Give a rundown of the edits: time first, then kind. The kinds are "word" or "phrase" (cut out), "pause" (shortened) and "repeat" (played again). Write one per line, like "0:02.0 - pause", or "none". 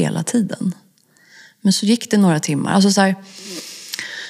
none